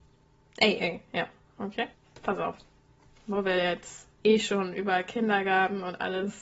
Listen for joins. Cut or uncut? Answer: cut